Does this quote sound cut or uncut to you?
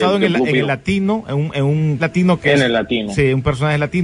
cut